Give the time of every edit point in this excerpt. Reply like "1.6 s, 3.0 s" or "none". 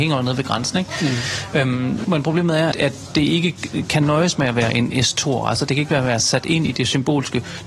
2.0 s, 2.7 s, 5.9 s